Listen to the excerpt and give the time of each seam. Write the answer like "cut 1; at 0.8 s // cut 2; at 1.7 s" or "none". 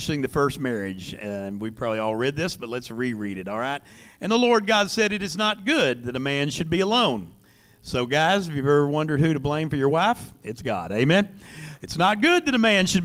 none